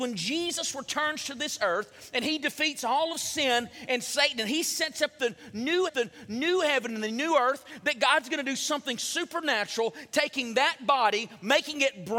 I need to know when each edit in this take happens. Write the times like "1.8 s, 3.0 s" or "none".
5.9 s